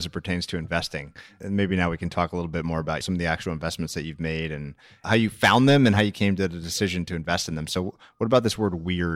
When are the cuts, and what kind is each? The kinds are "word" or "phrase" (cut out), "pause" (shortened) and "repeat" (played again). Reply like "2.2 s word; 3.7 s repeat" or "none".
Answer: none